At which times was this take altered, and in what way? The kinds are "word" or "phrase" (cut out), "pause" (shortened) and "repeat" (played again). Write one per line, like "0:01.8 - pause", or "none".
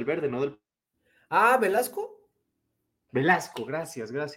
none